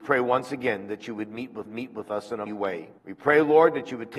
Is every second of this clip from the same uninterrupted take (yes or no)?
no